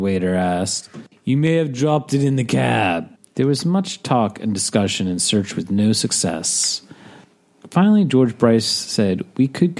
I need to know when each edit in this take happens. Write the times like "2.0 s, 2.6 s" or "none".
3.2 s